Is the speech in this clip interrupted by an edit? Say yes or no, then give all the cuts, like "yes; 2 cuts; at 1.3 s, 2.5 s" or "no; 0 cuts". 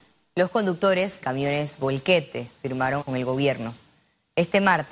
yes; 2 cuts; at 1.2 s, 3.0 s